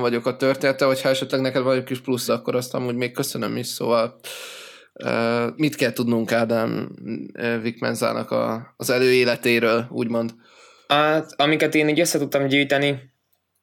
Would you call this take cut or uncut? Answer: cut